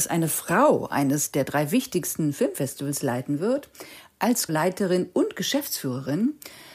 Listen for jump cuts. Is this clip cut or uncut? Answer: cut